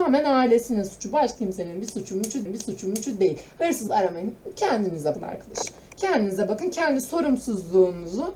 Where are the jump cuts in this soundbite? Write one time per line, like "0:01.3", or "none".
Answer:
0:01.4
0:02.5
0:03.9
0:05.1

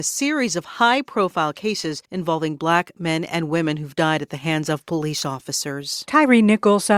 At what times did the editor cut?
0:02.0

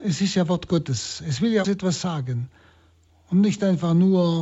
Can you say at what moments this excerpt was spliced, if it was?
0:01.6

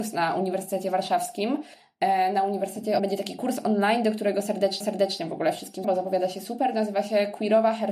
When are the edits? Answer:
0:03.0
0:04.8
0:05.8

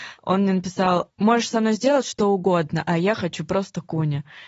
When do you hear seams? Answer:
none

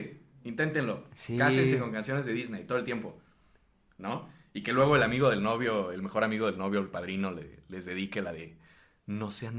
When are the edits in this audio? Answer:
none

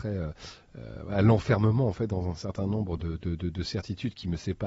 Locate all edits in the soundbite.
none

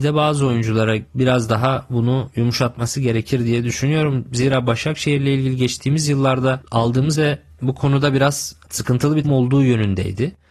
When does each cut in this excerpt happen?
0:07.1
0:09.2

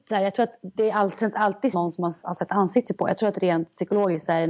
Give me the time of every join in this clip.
0:01.7

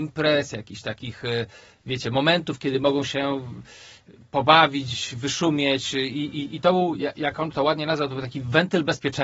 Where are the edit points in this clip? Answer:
none

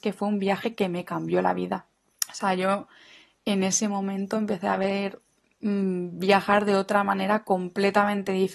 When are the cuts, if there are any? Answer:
none

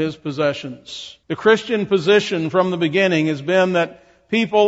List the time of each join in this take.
0:01.2

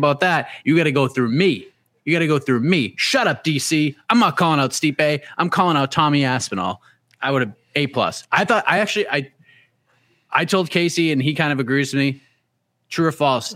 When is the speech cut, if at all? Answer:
none

